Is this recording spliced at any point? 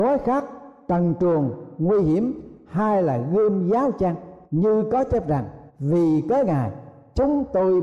yes; 2 cuts; at 4.4 s, 5.7 s

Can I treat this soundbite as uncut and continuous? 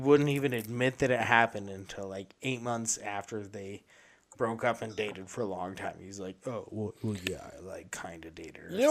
yes; 0 cuts

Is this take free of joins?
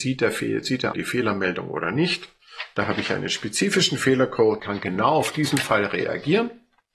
no; 2 cuts; at 0.9 s, 4.6 s

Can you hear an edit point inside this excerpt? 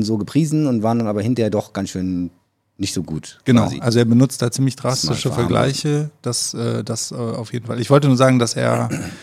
no; 0 cuts

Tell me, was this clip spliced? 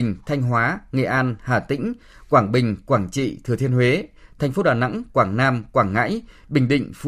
no; 0 cuts

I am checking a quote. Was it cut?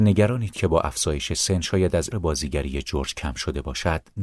yes; 1 cut; at 2.1 s

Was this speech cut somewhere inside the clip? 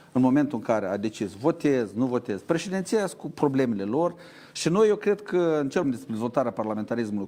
yes; 1 cut; at 5.8 s

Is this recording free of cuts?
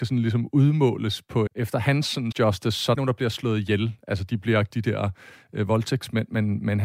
no; 4 cuts; at 1.5 s, 2.3 s, 2.9 s, 4.7 s

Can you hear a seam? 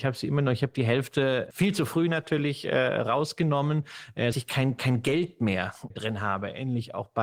yes; 3 cuts; at 1.5 s, 4.3 s, 5.9 s

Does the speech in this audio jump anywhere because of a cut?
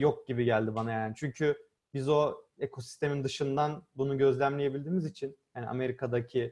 no; 0 cuts

